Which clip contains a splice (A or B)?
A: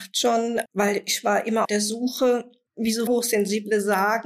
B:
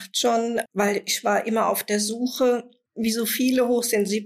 A